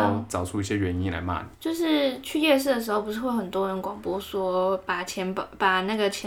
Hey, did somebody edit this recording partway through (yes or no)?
yes